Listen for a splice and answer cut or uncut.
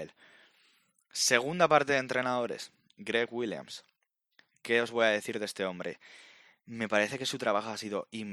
uncut